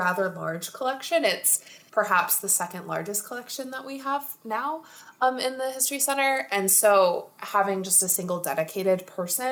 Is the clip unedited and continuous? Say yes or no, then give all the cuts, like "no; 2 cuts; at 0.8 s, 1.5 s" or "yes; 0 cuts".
yes; 0 cuts